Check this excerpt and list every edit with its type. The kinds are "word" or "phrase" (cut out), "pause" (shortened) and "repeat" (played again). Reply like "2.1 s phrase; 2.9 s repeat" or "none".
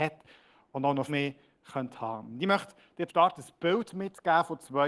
1.1 s word; 3.1 s word